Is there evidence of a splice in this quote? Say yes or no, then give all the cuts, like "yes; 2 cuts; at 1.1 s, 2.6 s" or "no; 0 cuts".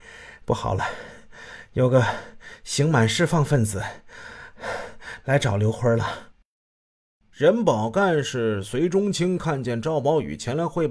no; 0 cuts